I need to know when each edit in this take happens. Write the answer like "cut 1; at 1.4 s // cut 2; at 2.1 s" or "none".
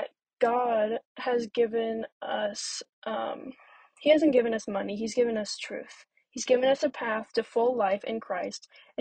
none

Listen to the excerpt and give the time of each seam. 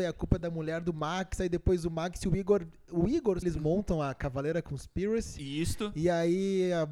cut 1; at 3.4 s

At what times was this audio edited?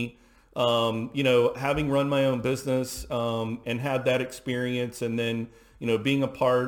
cut 1; at 3.6 s

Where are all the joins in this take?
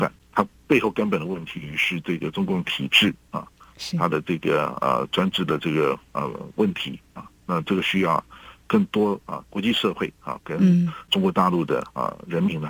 cut 1; at 8.6 s // cut 2; at 9.5 s

